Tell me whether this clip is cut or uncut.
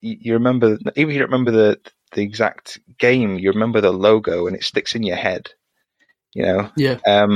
uncut